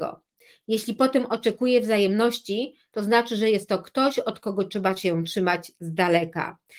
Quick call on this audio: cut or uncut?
uncut